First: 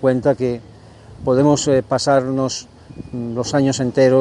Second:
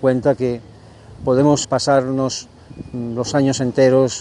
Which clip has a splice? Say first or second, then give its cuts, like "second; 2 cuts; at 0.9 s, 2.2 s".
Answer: second; 1 cut; at 1.6 s